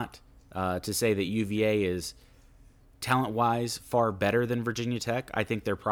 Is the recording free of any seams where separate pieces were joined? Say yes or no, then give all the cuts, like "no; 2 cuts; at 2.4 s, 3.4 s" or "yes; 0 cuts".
yes; 0 cuts